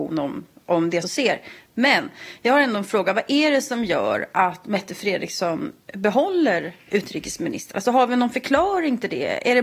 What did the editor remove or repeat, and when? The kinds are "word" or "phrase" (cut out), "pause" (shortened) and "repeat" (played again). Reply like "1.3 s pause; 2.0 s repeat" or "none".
1.0 s phrase